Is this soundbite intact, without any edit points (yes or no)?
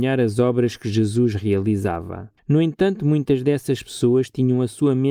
no